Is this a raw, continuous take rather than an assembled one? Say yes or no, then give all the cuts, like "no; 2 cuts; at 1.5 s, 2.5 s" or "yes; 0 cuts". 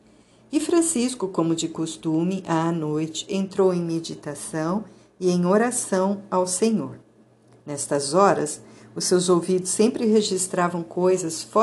yes; 0 cuts